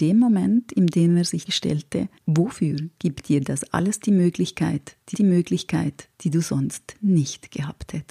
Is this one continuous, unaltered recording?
no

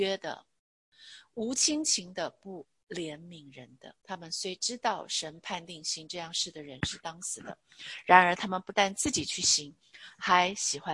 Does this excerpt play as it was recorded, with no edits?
no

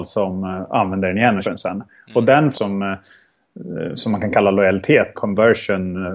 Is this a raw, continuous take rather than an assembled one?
no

